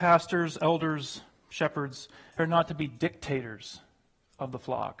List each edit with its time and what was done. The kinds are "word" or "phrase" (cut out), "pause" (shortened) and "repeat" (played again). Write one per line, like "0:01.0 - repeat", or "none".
0:02.4 - word